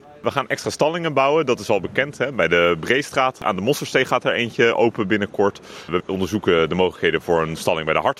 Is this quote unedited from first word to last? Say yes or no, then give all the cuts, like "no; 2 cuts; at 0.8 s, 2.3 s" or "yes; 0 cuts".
yes; 0 cuts